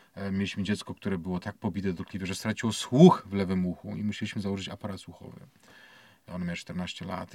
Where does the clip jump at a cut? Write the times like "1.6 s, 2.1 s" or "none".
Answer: none